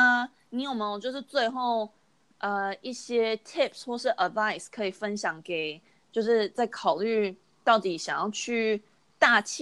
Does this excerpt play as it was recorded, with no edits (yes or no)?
yes